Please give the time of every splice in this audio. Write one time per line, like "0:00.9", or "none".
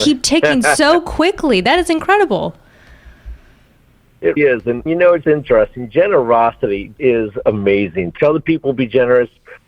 0:04.4
0:04.9
0:05.2
0:07.0
0:08.2